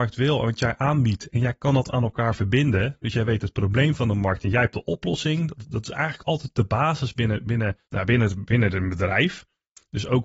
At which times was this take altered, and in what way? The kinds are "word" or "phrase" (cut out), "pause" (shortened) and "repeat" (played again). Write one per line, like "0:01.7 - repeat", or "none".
0:07.8 - pause